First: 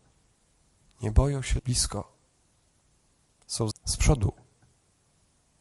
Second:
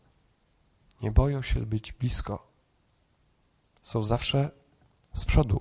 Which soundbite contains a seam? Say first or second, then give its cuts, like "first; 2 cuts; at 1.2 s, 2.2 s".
first; 2 cuts; at 1.6 s, 3.7 s